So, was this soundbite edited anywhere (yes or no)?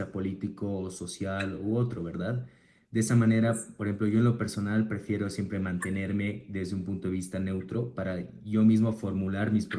no